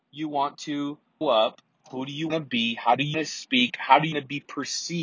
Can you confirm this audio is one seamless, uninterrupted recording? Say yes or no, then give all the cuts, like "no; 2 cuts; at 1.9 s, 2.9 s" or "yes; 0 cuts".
no; 4 cuts; at 1.2 s, 2.3 s, 3.1 s, 4.1 s